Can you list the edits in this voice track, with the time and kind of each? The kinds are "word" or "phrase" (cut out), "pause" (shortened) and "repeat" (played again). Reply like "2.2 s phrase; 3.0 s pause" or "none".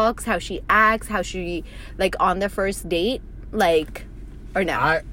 none